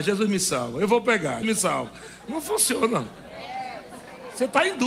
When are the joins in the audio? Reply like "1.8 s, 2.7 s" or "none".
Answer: 1.4 s